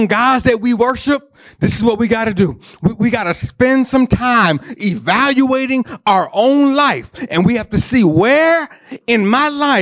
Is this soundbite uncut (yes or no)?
yes